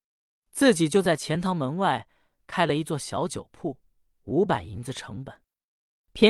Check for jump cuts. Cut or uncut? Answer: uncut